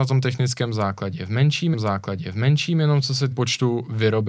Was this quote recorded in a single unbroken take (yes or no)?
no